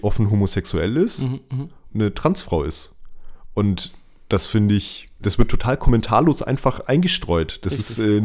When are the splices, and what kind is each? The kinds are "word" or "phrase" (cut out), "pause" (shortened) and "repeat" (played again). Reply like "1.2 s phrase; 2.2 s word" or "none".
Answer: 1.9 s phrase; 5.2 s word